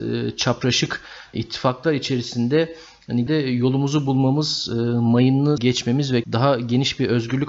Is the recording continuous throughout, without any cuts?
no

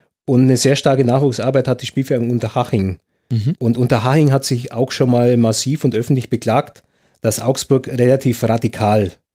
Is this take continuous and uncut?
yes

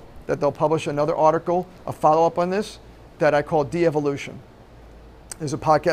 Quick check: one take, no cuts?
yes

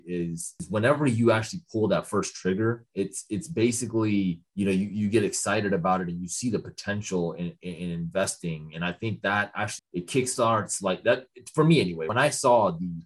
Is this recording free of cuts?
no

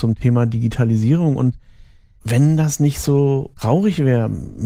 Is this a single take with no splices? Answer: yes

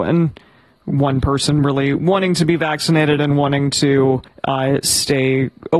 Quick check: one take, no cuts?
no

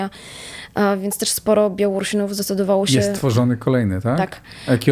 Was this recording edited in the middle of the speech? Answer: no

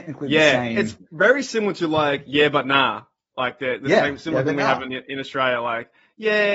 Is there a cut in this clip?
no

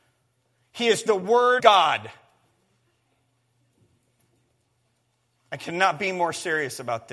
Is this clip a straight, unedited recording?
no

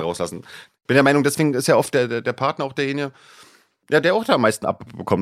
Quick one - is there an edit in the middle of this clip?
no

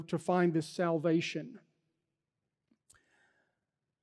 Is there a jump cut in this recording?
no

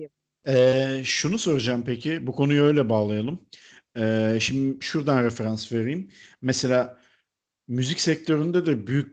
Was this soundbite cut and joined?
no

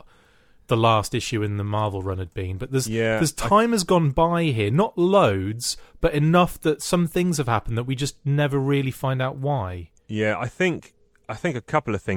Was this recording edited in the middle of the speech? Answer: no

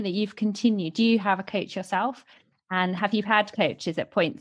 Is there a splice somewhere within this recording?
no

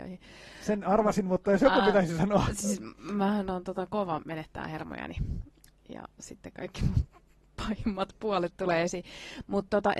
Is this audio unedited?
yes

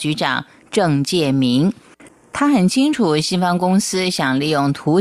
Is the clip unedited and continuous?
yes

